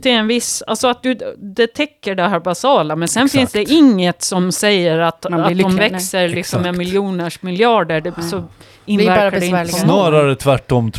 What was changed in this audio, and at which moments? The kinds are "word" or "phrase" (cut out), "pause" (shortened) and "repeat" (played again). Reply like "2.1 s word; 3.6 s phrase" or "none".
5.8 s word